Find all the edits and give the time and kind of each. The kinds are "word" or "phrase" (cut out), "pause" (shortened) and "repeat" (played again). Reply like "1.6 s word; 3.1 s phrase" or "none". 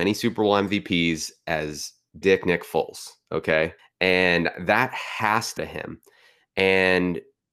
2.2 s word; 3.8 s pause; 5.6 s word

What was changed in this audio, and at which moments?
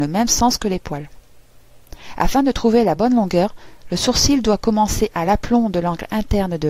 none

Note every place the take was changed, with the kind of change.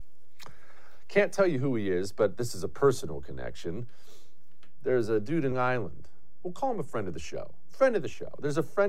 5.5 s word

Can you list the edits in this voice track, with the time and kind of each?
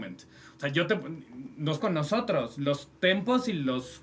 1.8 s word

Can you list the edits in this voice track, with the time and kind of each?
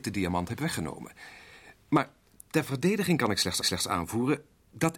3.6 s repeat

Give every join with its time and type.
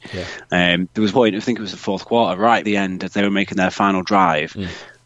1.1 s word; 2.6 s phrase

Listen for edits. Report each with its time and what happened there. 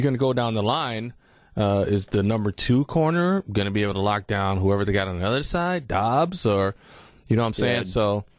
none

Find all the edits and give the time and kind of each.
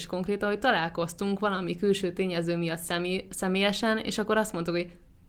none

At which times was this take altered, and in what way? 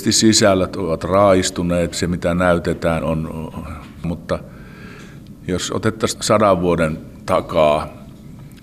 1.9 s word; 3.0 s word; 4.0 s word; 6.2 s word

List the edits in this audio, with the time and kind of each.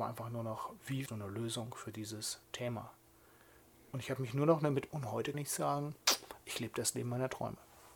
1.1 s word; 2.4 s pause; 4.9 s word; 5.3 s word

